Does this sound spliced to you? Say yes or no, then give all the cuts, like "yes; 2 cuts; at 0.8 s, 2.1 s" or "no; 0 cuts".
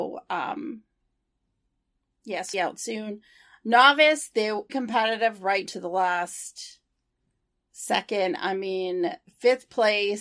yes; 3 cuts; at 2.5 s, 4.7 s, 5.7 s